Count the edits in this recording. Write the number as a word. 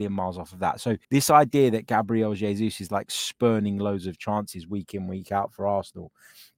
one